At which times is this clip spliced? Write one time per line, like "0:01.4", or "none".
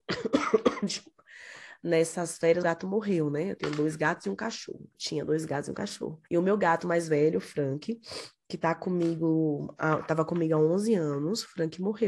0:02.6
0:04.9
0:06.3